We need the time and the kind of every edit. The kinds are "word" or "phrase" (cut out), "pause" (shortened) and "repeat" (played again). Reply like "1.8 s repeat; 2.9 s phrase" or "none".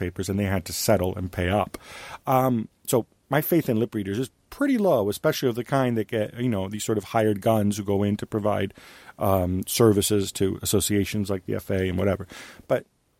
none

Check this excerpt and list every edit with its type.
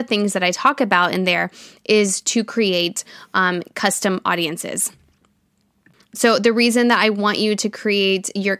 none

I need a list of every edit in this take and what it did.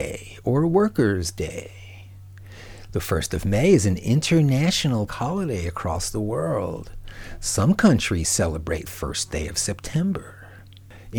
5.1 s word; 8.9 s phrase

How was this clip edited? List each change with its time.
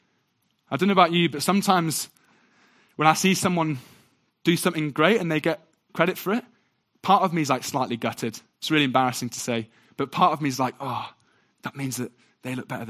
none

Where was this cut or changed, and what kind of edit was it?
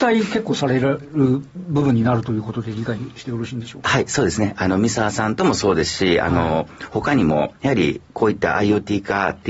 none

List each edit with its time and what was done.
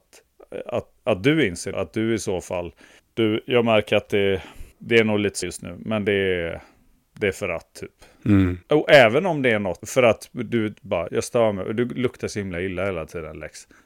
1.0 s pause; 1.7 s word; 3.0 s pause; 4.7 s pause; 5.4 s word; 8.6 s pause; 9.8 s word; 11.1 s word

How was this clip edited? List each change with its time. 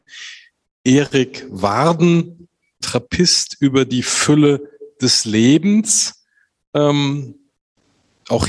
2.8 s phrase

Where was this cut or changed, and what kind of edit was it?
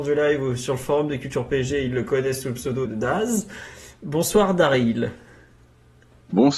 2.9 s word

